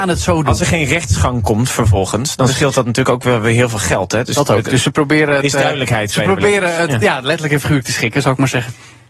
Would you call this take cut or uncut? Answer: uncut